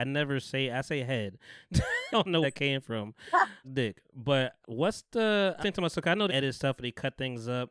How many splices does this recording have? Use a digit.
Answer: 7